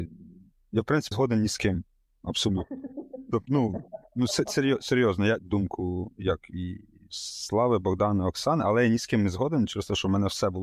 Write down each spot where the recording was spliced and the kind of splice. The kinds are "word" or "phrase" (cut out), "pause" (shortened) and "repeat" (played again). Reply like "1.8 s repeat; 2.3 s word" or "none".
1.1 s word; 5.4 s phrase